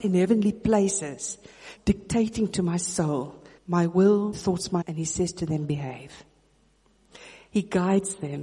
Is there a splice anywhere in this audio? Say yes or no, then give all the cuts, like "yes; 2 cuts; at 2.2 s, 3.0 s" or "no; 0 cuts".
yes; 4 cuts; at 1.8 s, 3.6 s, 4.3 s, 4.8 s